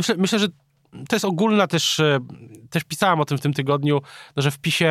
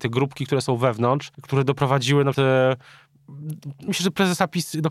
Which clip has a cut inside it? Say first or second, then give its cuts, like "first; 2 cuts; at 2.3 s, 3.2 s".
second; 3 cuts; at 1.3 s, 2.3 s, 3.9 s